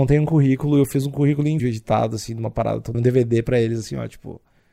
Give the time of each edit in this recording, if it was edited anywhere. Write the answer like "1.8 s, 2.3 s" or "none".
1.6 s, 2.9 s